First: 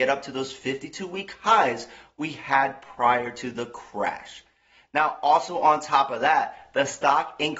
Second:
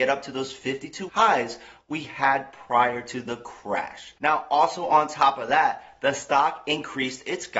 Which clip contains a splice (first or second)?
second